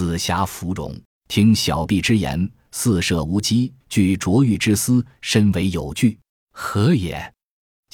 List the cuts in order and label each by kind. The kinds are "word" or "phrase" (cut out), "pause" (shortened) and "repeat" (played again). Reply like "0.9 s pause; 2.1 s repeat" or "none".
1.1 s pause; 3.8 s pause; 6.3 s pause